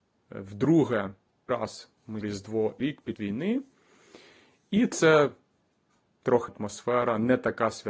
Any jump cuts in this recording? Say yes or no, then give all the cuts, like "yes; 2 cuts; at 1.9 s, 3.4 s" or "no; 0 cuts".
yes; 5 cuts; at 1.5 s, 2.2 s, 2.8 s, 3.2 s, 6.5 s